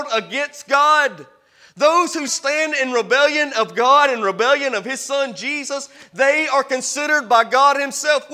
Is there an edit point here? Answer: yes; 1 cut; at 2.3 s

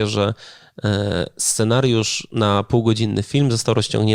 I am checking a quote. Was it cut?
no; 0 cuts

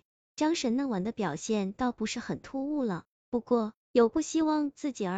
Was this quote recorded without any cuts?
no; 1 cut; at 3.8 s

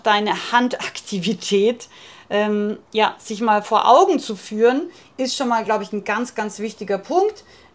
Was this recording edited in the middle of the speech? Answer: no; 0 cuts

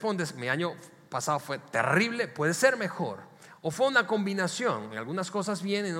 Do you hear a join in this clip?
no; 0 cuts

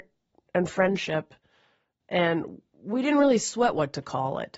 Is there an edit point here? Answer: no; 0 cuts

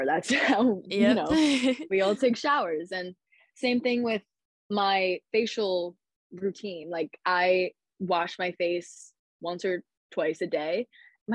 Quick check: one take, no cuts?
yes; 0 cuts

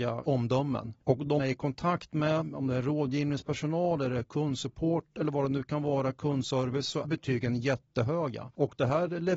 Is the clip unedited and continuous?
no; 2 cuts; at 1.4 s, 7.0 s

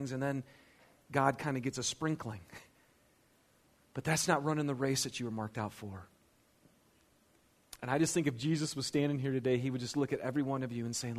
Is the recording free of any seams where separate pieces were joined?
yes; 0 cuts

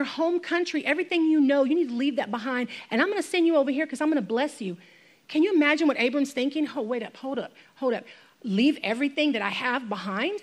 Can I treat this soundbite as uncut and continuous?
yes; 0 cuts

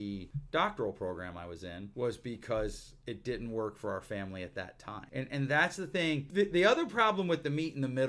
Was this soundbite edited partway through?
no; 0 cuts

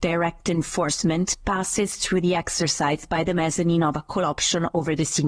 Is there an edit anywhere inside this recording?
no; 0 cuts

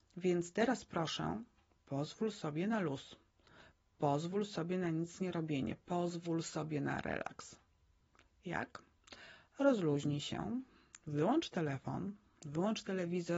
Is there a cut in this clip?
no; 0 cuts

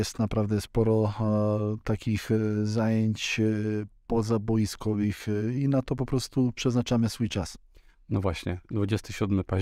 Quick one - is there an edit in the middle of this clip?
no; 0 cuts

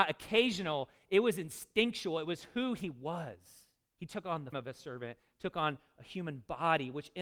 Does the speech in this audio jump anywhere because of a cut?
yes; 2 cuts; at 3.8 s, 4.5 s

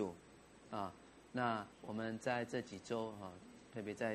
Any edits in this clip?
yes; 1 cut; at 1.7 s

